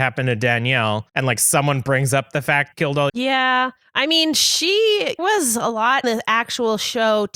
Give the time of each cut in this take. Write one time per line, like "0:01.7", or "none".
0:01.1
0:02.7
0:03.1
0:03.8
0:05.2
0:06.0